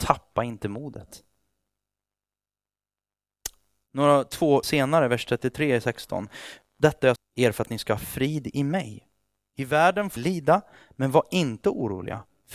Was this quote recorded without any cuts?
no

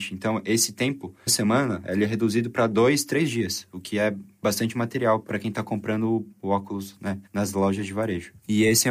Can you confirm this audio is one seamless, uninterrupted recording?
no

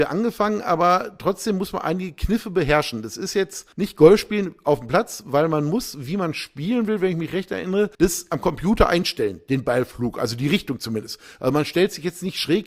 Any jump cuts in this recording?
yes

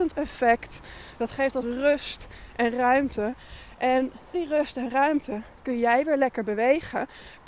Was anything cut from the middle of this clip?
yes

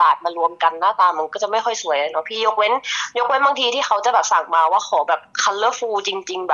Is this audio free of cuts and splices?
yes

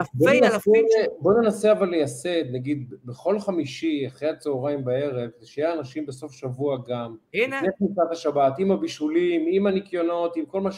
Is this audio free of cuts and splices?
no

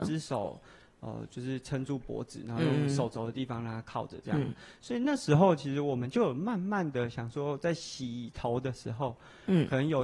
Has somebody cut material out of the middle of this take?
no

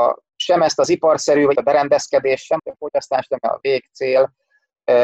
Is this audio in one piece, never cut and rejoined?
no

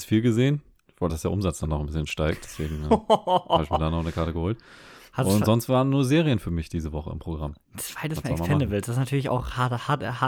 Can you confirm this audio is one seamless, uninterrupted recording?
no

